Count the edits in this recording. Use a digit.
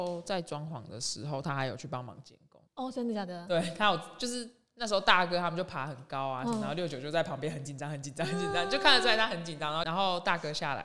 1